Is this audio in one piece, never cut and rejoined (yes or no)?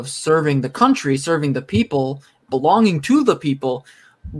yes